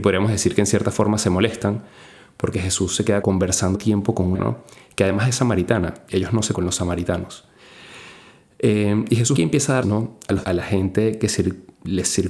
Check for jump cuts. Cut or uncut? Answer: cut